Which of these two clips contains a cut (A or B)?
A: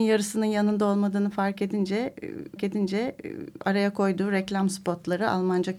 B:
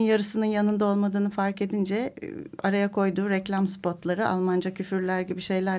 A